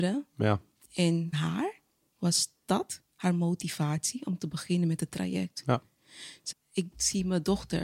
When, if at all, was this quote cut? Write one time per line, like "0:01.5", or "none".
0:01.3
0:03.1
0:06.5